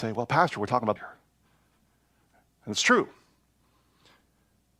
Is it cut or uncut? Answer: cut